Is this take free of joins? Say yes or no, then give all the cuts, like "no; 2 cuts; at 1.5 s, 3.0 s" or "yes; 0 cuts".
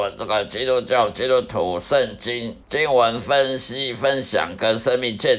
no; 1 cut; at 2.6 s